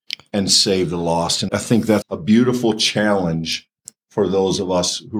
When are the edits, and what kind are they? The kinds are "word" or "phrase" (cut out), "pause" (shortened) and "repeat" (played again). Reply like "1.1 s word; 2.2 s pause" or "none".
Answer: 1.5 s word; 2.0 s word

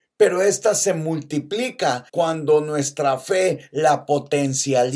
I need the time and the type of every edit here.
2.1 s pause

